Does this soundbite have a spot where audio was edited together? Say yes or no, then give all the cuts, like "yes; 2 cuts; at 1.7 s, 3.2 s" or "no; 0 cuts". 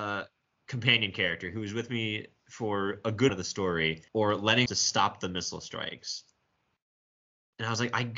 yes; 3 cuts; at 3.3 s, 4.1 s, 4.7 s